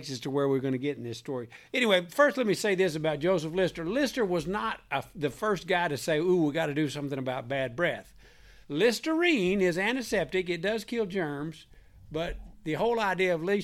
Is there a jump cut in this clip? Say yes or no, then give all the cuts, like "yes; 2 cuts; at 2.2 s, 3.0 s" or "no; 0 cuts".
yes; 1 cut; at 8.6 s